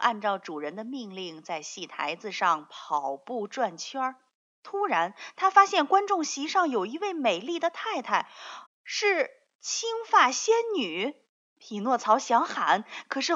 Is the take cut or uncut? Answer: cut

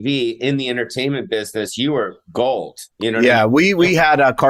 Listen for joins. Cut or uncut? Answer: cut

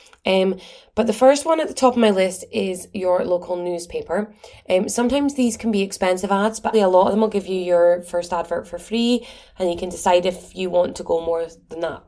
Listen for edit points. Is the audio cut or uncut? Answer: cut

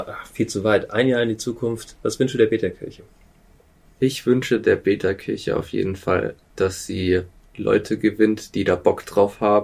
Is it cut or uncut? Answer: uncut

